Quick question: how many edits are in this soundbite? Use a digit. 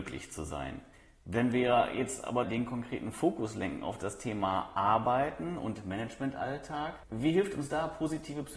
1